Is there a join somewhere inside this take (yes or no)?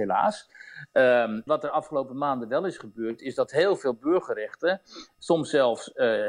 yes